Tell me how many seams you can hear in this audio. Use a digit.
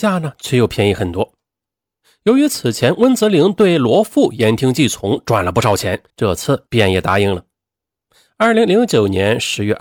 1